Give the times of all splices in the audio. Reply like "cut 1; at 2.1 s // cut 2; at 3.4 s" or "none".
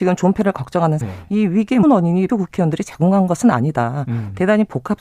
cut 1; at 1.0 s // cut 2; at 1.8 s // cut 3; at 2.3 s

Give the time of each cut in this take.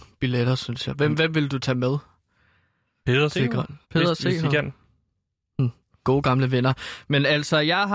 cut 1; at 3.8 s // cut 2; at 6.0 s

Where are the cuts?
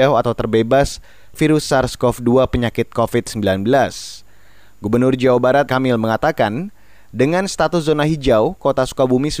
cut 1; at 1.4 s // cut 2; at 5.7 s

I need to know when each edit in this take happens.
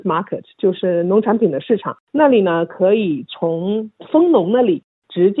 cut 1; at 2.0 s

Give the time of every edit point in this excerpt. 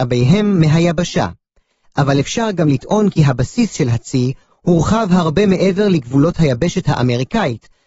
none

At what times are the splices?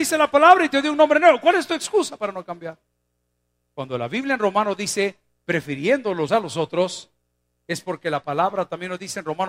cut 1; at 6.3 s

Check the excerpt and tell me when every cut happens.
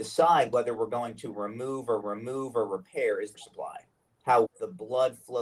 cut 1; at 2.0 s // cut 2; at 3.3 s // cut 3; at 4.5 s

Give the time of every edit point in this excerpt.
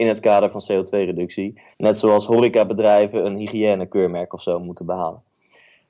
cut 1; at 1.7 s

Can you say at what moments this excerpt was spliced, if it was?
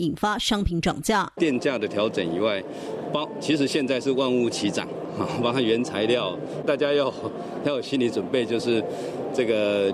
cut 1; at 6.6 s

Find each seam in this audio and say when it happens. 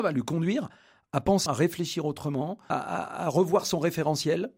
cut 1; at 1.5 s // cut 2; at 2.7 s

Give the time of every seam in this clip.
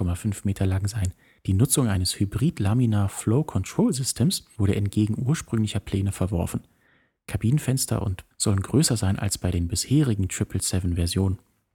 cut 1; at 8.3 s

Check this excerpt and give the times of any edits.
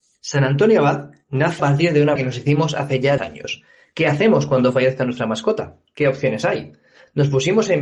cut 1; at 1.6 s // cut 2; at 2.2 s // cut 3; at 3.2 s

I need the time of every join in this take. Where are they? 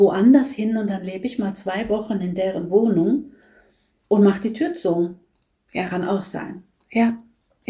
none

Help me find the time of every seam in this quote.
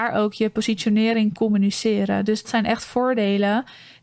cut 1; at 1.4 s // cut 2; at 2.4 s

